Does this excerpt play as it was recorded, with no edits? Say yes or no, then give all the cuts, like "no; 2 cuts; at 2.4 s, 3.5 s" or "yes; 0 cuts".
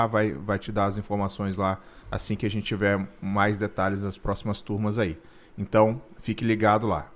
no; 1 cut; at 2.0 s